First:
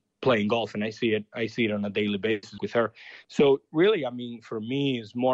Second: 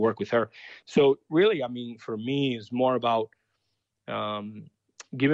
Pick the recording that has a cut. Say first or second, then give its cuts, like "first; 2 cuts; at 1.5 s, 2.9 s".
first; 1 cut; at 2.6 s